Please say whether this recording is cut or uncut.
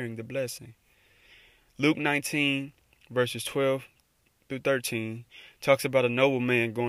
uncut